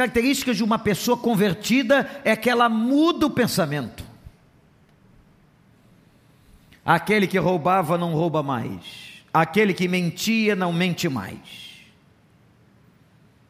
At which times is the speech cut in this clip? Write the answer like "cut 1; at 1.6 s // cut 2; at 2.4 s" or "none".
none